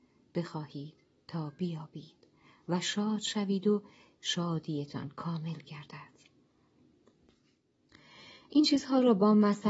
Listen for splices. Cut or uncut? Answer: uncut